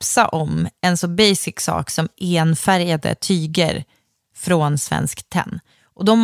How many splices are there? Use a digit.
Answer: 0